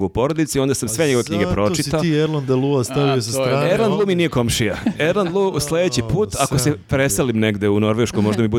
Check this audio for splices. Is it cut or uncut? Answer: uncut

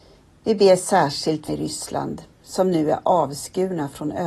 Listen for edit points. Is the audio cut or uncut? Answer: cut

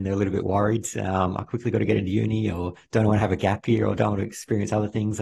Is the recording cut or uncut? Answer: uncut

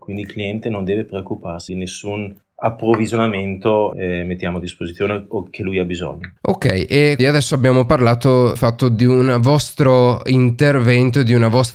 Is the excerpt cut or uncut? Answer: cut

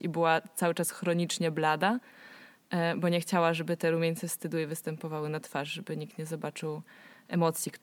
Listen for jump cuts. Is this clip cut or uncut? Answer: uncut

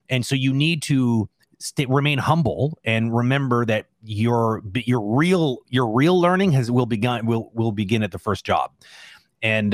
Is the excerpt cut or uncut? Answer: uncut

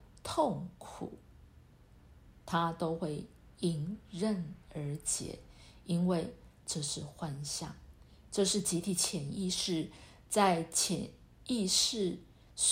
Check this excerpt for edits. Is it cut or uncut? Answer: uncut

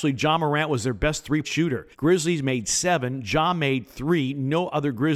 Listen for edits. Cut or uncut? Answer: cut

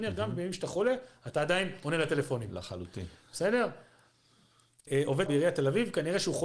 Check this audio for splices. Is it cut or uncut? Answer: cut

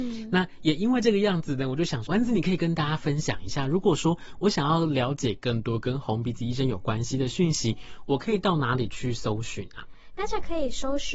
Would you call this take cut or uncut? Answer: cut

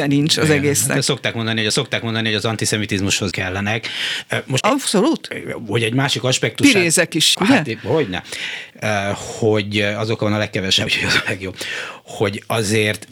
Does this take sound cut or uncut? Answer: cut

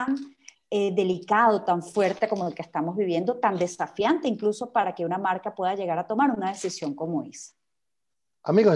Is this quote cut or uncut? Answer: uncut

